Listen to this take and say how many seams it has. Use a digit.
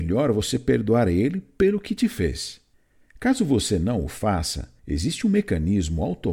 2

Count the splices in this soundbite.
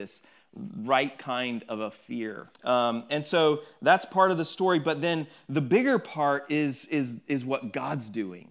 1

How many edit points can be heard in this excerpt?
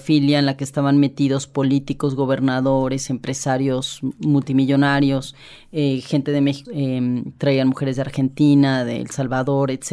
1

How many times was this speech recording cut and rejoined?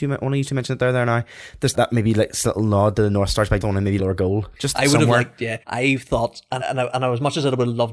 5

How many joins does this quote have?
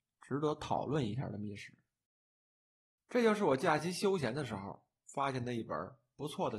0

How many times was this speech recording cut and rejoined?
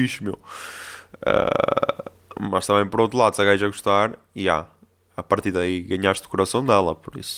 0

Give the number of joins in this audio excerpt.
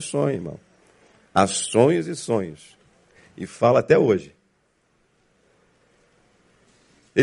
0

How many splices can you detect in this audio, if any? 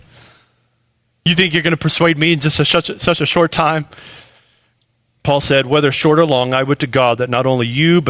0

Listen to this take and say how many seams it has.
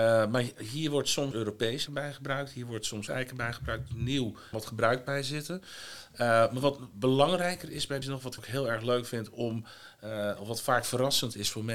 6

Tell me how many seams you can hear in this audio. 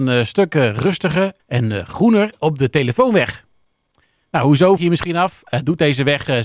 2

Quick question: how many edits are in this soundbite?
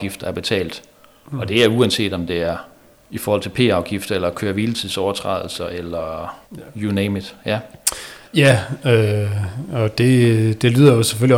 3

